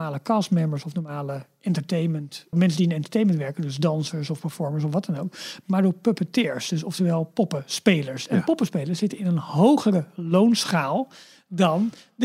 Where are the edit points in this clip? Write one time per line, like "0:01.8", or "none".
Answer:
0:02.5